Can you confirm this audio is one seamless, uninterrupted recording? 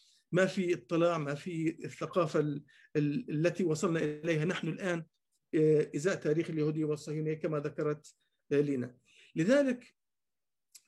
yes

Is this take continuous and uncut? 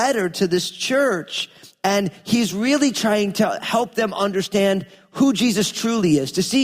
yes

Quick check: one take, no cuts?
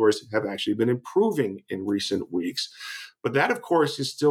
yes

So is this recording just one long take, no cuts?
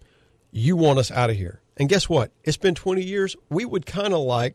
yes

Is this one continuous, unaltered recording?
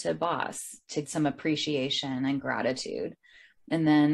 no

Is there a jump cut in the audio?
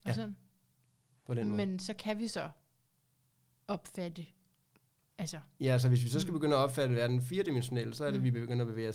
no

